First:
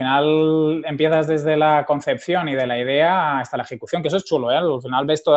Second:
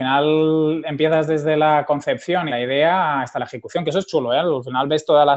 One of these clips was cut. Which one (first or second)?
second